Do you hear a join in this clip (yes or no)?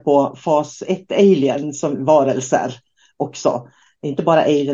no